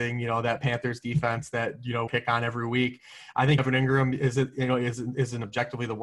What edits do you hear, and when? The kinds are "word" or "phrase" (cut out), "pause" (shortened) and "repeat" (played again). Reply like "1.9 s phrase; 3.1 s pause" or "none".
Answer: 2.1 s phrase; 3.6 s word

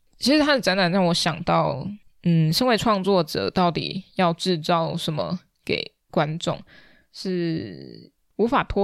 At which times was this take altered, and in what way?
none

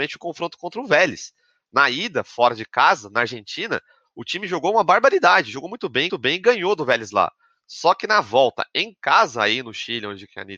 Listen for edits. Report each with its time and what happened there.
6.1 s repeat

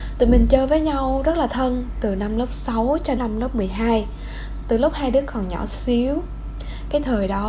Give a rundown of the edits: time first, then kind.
3.2 s word

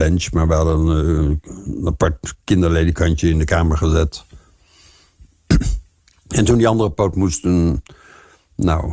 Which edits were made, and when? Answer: none

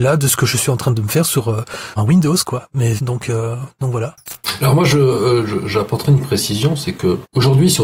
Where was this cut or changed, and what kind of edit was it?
2.0 s word; 3.0 s word

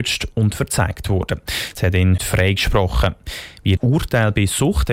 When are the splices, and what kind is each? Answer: 1.7 s word; 2.2 s word; 3.8 s word

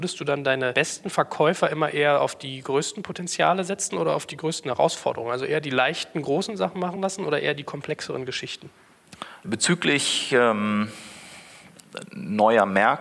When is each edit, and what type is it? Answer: none

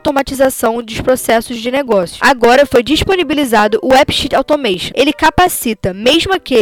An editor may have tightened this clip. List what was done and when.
none

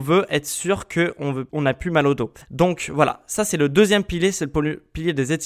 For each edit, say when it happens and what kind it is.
1.5 s pause; 2.4 s pause

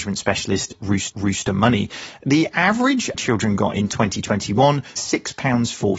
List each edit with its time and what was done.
1.1 s repeat; 3.1 s phrase; 5.0 s word

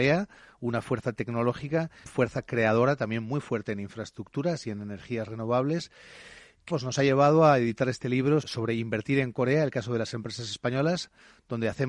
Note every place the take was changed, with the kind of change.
2.0 s phrase; 6.7 s word; 8.4 s word

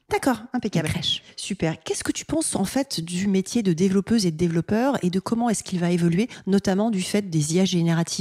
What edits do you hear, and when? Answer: none

